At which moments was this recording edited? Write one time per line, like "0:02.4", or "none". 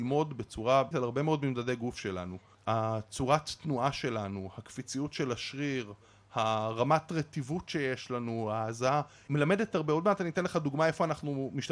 0:00.9

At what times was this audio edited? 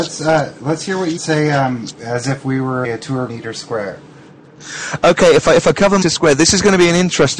0:01.2
0:02.0
0:02.8
0:03.3
0:06.0

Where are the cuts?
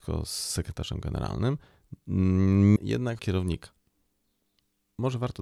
0:02.8
0:03.2

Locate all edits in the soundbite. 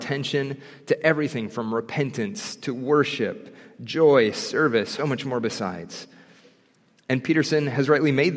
0:05.0

